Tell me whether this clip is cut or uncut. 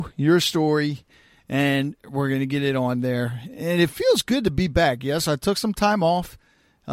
uncut